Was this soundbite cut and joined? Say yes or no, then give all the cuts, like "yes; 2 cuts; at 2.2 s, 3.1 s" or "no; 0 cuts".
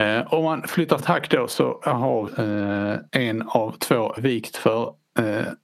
yes; 4 cuts; at 1.0 s, 2.3 s, 3.1 s, 4.2 s